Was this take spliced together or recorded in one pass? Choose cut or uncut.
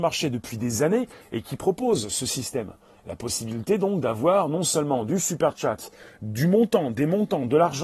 uncut